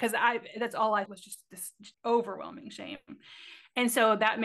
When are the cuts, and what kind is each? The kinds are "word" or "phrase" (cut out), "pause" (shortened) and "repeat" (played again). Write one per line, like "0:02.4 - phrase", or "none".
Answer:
0:01.1 - word
0:01.9 - pause